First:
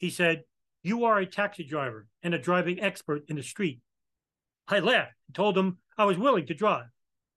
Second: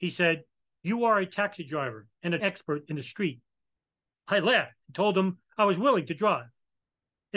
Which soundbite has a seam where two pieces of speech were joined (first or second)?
second